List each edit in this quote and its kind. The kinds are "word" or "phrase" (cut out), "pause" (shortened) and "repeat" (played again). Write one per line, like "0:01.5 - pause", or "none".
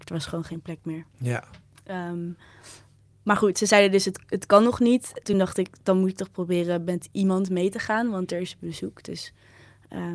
none